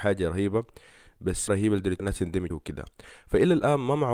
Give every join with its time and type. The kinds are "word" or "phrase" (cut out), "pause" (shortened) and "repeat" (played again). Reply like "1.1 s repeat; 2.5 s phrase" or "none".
1.5 s word; 2.0 s phrase; 2.5 s word